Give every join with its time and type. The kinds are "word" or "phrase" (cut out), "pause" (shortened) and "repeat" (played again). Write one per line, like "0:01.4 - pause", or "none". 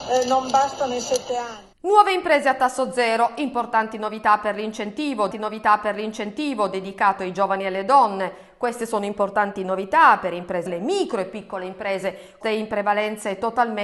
0:01.7 - pause
0:05.3 - repeat
0:10.7 - phrase
0:12.4 - word